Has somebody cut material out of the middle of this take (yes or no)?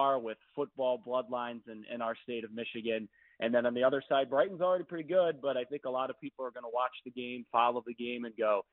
no